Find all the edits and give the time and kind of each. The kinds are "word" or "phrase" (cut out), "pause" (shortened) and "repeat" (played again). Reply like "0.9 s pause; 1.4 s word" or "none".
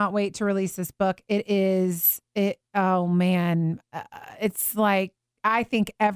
none